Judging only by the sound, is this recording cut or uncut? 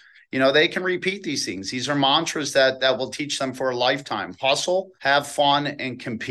cut